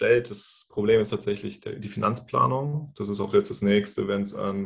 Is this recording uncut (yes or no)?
yes